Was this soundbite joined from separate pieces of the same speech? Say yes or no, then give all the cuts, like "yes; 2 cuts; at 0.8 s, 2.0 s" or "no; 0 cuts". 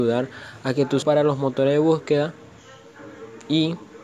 yes; 1 cut; at 1.0 s